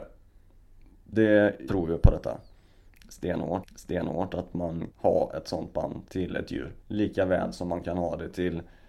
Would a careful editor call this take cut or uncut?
cut